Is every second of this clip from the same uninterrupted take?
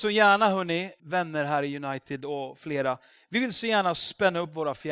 no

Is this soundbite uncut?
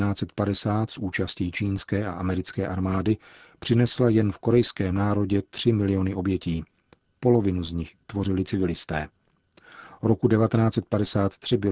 yes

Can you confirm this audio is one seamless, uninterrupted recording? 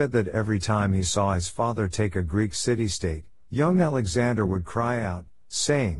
yes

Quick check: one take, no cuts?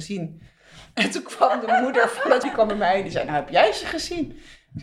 no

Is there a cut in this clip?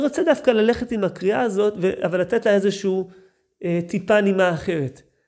no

